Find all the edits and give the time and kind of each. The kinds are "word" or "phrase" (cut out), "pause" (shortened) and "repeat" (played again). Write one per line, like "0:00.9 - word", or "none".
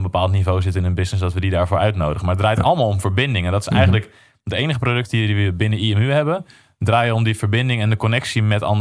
none